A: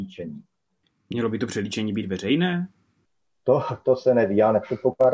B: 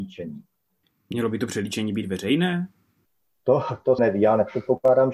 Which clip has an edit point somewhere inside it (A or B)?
B